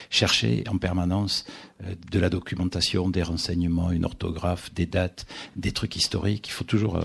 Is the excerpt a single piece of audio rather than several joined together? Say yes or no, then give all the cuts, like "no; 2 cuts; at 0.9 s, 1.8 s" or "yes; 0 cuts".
yes; 0 cuts